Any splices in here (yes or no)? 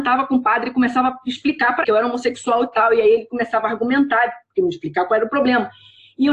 yes